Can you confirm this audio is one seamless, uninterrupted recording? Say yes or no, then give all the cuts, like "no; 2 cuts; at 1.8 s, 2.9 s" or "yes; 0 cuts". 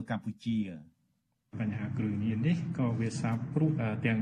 yes; 0 cuts